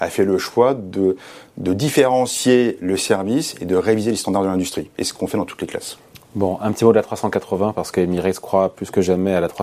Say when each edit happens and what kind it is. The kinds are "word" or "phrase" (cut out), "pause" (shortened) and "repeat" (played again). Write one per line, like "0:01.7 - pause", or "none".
none

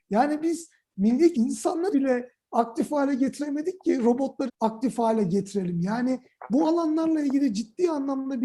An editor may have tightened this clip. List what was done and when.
0:01.3 - word
0:01.9 - word
0:04.5 - word

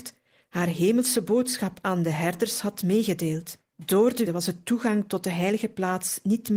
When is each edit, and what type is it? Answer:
0:03.7 - pause
0:04.3 - word

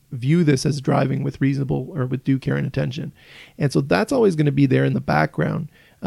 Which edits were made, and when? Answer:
none

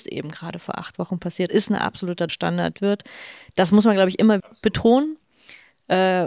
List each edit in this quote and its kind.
0:01.5 - phrase
0:02.3 - word
0:02.7 - phrase
0:04.4 - word

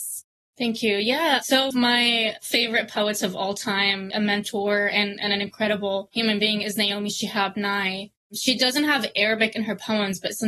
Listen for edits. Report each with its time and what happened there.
0:01.7 - phrase
0:04.1 - phrase

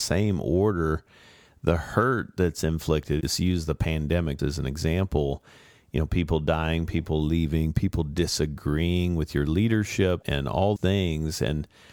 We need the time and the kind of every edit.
0:03.2 - word
0:04.4 - word
0:10.2 - word
0:10.8 - word

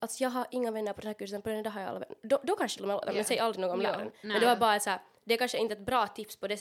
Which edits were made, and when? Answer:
0:02.8 - word

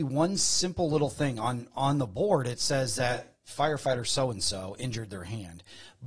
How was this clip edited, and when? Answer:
none

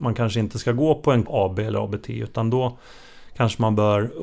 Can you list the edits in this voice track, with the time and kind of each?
0:01.2 - word

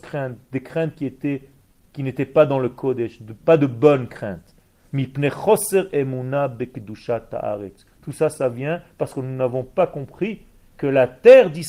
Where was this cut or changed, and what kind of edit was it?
none

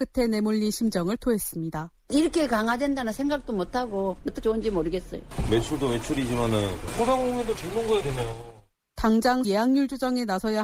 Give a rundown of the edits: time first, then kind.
0:04.4 - word
0:07.6 - word
0:08.0 - phrase
0:09.4 - phrase

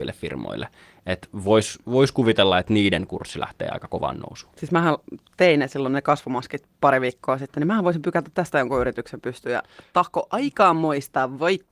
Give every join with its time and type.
none

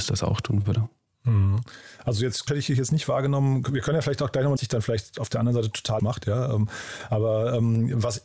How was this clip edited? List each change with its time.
0:02.5 - word
0:04.6 - phrase
0:06.0 - word

